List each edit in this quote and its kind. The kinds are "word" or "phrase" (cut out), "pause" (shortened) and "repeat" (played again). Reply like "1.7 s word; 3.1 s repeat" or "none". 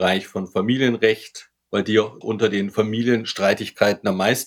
1.6 s pause; 2.2 s word

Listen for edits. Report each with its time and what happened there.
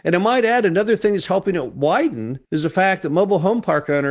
2.5 s pause

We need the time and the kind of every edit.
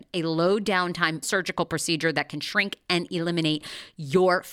1.2 s word

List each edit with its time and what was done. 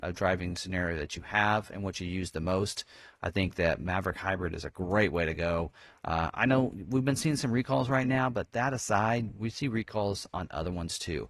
none

